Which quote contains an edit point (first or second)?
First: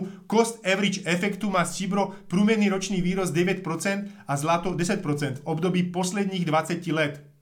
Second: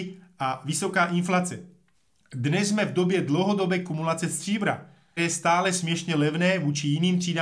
second